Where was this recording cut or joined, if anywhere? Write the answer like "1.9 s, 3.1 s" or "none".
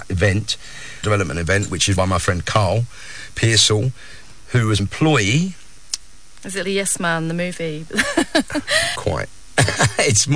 1.0 s, 2.0 s, 4.8 s, 6.6 s, 9.0 s